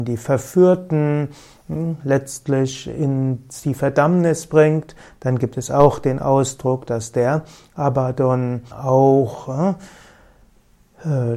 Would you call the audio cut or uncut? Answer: cut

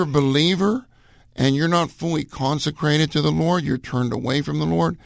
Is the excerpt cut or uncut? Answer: uncut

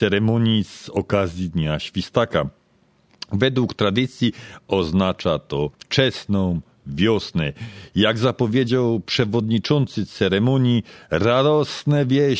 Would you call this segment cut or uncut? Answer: cut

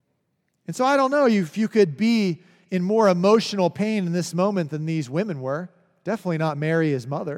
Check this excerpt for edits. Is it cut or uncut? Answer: uncut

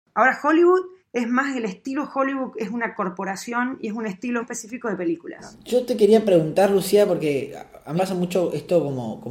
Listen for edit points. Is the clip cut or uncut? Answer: cut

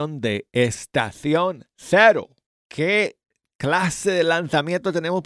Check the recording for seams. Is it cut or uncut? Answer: cut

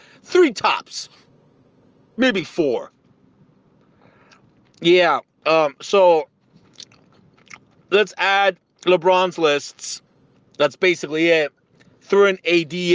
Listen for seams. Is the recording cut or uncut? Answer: uncut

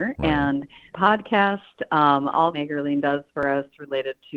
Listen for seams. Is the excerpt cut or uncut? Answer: cut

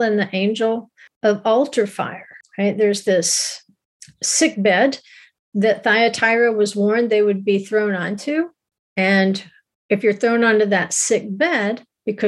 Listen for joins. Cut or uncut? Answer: uncut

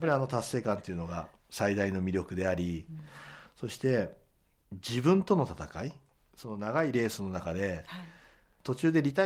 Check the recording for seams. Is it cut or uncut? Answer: cut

